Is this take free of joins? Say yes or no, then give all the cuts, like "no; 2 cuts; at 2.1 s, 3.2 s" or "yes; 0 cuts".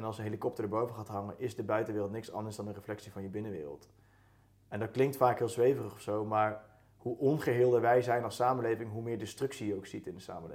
yes; 0 cuts